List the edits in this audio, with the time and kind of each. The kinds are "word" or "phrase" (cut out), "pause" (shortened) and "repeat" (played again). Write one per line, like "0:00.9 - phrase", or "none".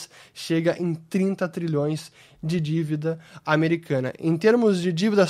none